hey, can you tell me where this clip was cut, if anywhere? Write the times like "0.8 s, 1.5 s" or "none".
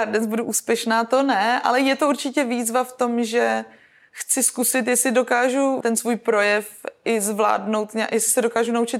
5.8 s